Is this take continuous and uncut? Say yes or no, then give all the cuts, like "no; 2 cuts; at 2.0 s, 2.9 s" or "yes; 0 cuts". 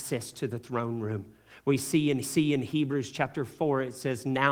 no; 1 cut; at 2.2 s